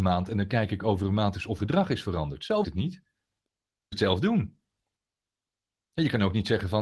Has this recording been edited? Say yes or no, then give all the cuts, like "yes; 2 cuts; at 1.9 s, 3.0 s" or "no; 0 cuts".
yes; 3 cuts; at 1.6 s, 2.6 s, 3.9 s